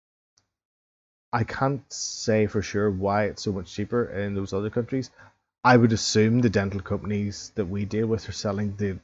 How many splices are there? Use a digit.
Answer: 0